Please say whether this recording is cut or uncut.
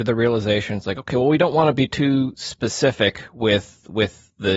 uncut